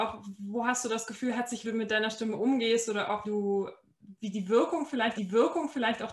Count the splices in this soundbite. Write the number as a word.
three